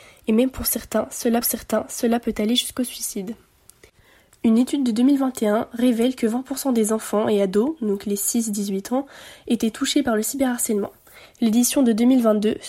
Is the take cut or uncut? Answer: cut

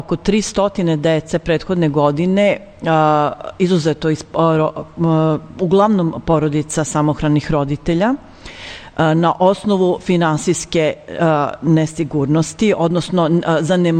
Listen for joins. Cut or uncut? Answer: uncut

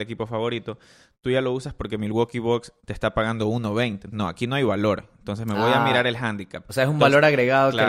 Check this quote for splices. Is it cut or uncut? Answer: cut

